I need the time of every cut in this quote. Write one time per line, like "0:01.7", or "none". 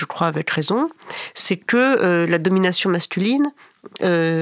none